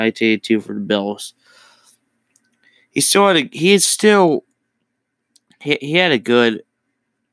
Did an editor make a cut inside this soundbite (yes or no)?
no